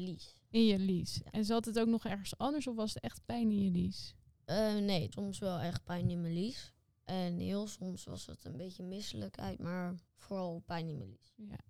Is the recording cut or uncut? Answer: cut